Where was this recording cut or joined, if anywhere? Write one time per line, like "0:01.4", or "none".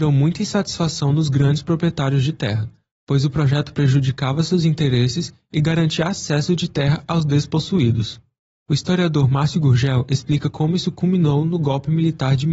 none